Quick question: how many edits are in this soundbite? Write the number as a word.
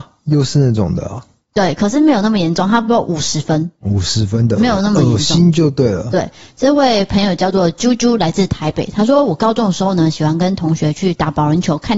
zero